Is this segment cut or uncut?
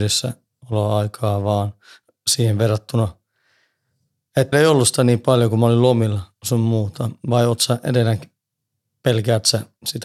cut